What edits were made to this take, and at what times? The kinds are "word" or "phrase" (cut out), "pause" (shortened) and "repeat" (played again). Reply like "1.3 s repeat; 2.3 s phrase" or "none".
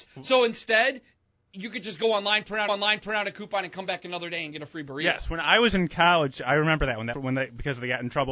2.7 s repeat; 7.1 s phrase